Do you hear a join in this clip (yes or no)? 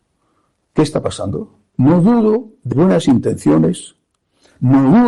yes